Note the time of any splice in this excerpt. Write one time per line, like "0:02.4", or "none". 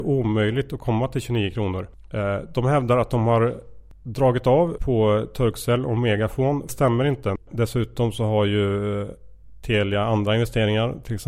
0:04.8
0:06.7